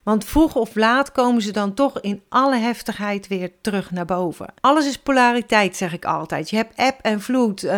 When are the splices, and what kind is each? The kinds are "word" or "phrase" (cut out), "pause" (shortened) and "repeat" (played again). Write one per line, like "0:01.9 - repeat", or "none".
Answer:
0:04.6 - pause